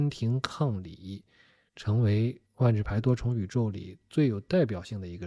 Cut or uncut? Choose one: cut